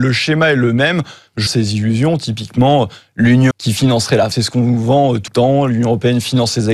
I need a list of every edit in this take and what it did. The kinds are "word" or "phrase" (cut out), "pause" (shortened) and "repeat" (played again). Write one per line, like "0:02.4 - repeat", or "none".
0:01.5 - word
0:03.5 - word
0:04.3 - word
0:05.3 - word